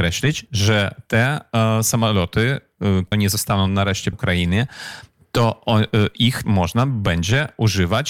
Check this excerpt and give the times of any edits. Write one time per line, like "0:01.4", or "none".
0:03.1
0:04.1
0:06.4

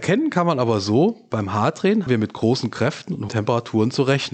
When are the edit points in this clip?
0:02.1
0:03.3

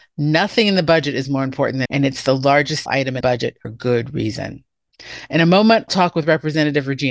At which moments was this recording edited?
0:01.9
0:02.9
0:03.2
0:03.6
0:05.9

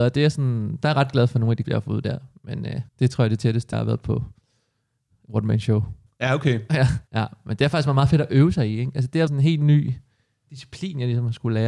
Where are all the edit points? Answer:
0:01.6
0:02.9
0:03.7
0:06.1
0:07.1
0:09.3

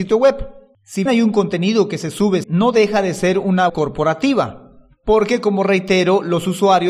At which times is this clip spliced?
0:01.1
0:02.4
0:03.7

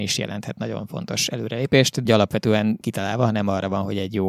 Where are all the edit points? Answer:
0:02.1
0:02.8

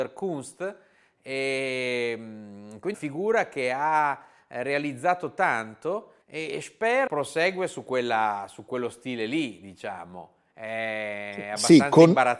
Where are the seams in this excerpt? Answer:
0:02.9
0:06.2
0:07.1

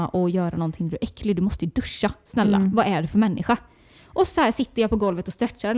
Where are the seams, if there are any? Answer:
0:04.3

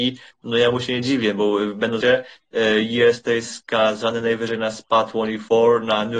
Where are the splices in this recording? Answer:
0:02.0

